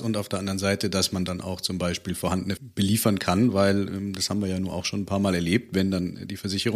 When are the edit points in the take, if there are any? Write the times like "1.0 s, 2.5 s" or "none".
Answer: 2.6 s